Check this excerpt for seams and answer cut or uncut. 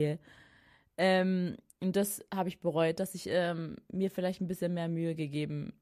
uncut